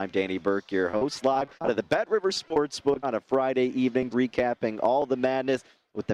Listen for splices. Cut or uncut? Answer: cut